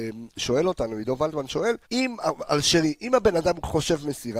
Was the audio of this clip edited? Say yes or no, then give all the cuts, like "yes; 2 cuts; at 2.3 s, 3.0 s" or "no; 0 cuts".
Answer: yes; 1 cut; at 1.8 s